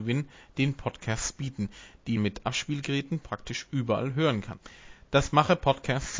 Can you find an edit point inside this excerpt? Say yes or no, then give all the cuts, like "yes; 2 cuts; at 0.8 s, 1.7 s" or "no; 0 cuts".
yes; 1 cut; at 2.2 s